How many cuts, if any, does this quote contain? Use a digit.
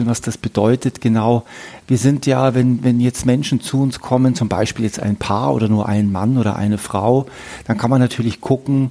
0